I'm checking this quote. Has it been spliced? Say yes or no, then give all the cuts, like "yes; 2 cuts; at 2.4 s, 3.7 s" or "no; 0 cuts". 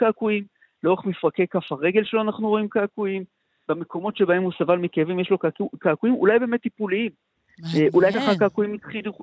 no; 0 cuts